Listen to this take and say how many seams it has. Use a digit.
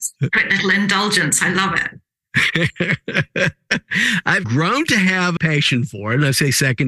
1